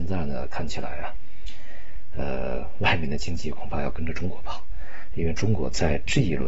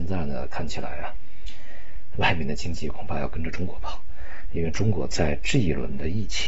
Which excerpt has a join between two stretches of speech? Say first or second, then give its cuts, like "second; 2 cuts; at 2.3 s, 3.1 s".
second; 1 cut; at 2.2 s